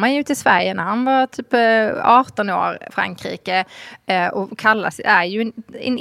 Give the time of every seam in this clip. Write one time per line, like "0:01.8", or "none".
0:02.9